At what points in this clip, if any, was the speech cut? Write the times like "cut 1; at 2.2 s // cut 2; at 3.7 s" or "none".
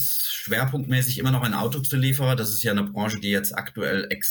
none